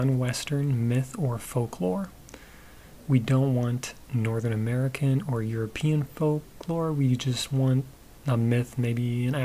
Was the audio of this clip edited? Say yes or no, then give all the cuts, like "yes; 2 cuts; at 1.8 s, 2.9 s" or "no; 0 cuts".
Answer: no; 0 cuts